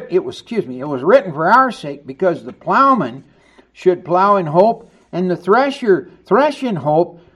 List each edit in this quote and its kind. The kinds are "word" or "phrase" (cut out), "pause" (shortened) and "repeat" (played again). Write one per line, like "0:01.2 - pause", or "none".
none